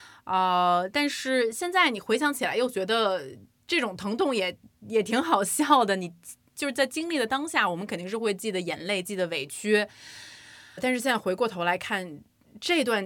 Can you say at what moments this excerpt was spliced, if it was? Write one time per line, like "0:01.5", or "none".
0:10.8